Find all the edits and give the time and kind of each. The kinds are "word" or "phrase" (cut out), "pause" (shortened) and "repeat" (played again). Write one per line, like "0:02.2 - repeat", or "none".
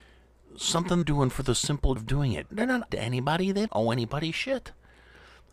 0:01.0 - word
0:02.0 - word
0:02.5 - word
0:02.9 - word
0:03.7 - word